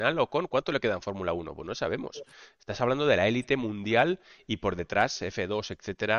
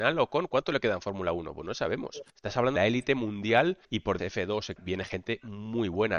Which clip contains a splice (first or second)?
second